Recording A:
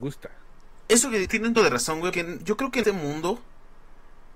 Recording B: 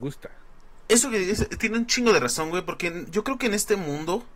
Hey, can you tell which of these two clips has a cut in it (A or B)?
A